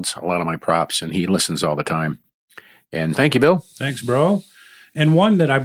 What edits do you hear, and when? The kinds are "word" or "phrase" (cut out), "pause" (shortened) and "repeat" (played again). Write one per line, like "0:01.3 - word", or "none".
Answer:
0:03.1 - word

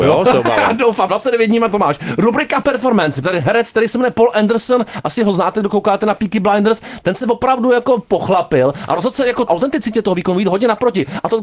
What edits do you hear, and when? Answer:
0:02.6 - word
0:09.5 - word

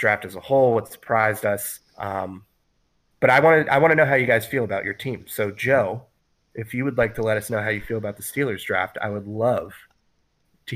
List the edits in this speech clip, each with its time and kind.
none

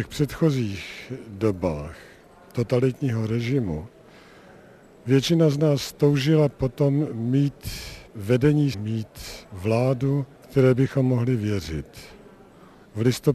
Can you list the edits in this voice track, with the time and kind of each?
0:08.7 - word
0:10.3 - pause

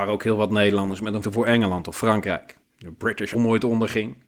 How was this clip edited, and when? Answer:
0:01.2 - word
0:02.6 - pause
0:03.3 - phrase

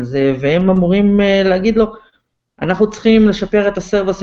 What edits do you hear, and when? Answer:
none

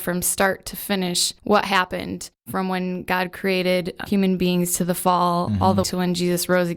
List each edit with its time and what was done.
0:01.4 - pause
0:04.1 - word
0:05.8 - word

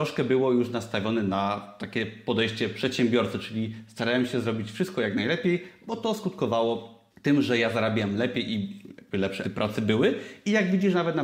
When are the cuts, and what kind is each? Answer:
0:07.1 - pause
0:09.4 - word

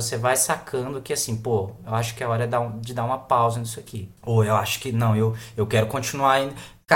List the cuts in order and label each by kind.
0:04.2 - pause

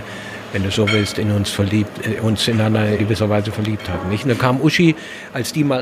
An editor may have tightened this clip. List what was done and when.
0:03.0 - word

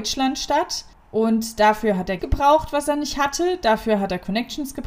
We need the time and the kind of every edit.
0:00.9 - pause
0:02.2 - word

